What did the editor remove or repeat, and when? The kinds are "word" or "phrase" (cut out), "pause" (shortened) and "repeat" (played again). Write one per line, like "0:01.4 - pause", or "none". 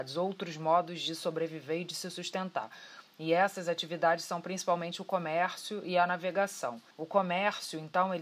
0:06.9 - pause